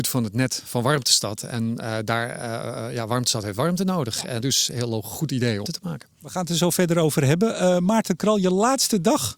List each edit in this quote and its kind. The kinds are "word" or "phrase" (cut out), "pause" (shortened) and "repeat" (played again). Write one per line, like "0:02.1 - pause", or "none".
0:04.4 - word
0:05.6 - phrase